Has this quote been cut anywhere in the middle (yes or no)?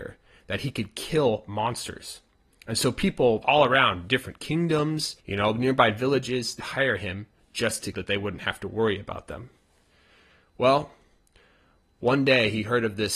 yes